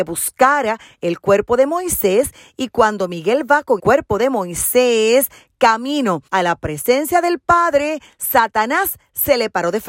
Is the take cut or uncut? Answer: cut